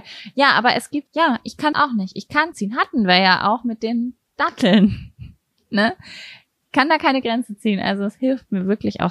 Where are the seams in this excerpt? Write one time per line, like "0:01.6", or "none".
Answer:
0:01.1
0:01.7
0:02.5